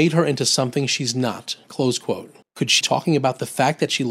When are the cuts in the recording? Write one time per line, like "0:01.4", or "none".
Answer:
0:01.6
0:02.4
0:02.8

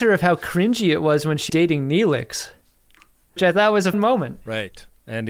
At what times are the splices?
0:01.5
0:03.4
0:03.9

